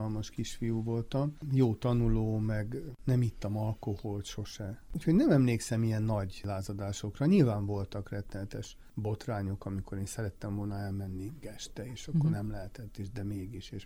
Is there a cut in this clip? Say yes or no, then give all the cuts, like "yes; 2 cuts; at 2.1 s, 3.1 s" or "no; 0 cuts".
yes; 1 cut; at 11.4 s